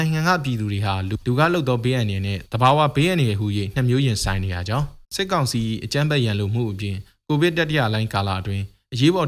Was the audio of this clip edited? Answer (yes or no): yes